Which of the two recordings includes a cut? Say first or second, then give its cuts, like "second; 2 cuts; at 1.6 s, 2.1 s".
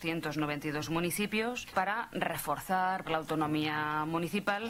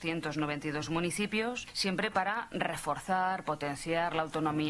first; 2 cuts; at 1.7 s, 3.1 s